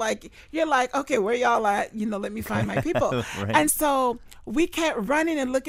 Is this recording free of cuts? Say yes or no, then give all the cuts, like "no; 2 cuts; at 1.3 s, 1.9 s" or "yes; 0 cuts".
yes; 0 cuts